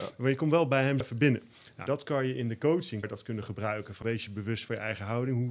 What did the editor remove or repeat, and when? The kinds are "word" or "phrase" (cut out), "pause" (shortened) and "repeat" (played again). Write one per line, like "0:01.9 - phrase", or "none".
0:01.0 - word
0:01.9 - word
0:03.0 - word
0:04.0 - word